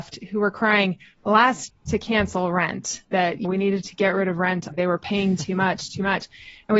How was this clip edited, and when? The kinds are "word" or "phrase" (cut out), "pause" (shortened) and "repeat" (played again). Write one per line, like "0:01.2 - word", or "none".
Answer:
0:01.7 - word
0:03.1 - word
0:03.4 - word
0:04.7 - word